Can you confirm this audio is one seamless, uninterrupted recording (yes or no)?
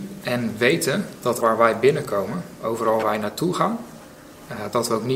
no